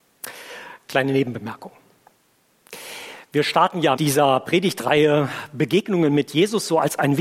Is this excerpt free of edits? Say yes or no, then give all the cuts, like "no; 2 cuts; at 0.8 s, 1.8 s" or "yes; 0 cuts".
no; 1 cut; at 4.0 s